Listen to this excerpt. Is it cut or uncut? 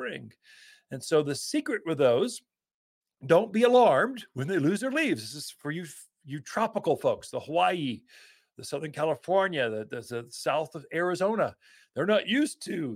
uncut